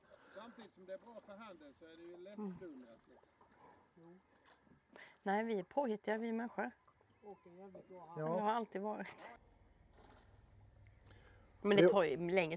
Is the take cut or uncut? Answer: uncut